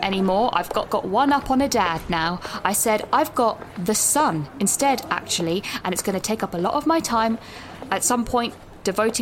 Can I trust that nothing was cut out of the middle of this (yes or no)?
yes